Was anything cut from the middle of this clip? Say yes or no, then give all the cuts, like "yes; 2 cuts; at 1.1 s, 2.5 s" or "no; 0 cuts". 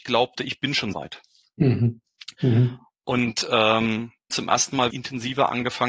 yes; 3 cuts; at 0.9 s, 4.3 s, 4.9 s